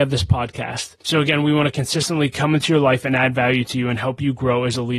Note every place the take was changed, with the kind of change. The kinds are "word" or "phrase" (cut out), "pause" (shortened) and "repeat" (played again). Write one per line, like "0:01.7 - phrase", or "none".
0:01.0 - pause